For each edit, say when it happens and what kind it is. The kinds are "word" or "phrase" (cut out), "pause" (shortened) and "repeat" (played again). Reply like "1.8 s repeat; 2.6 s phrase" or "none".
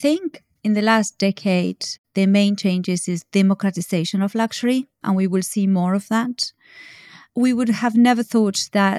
none